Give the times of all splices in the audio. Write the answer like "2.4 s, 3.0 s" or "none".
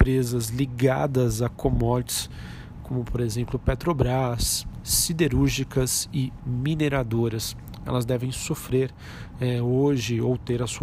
none

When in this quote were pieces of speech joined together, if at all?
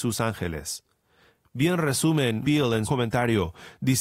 2.4 s, 2.8 s

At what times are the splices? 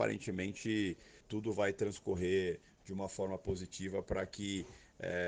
1.2 s

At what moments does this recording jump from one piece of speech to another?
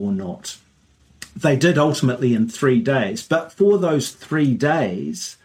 none

